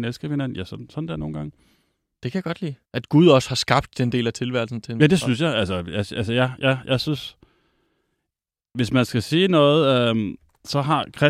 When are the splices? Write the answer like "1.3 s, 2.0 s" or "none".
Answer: 2.8 s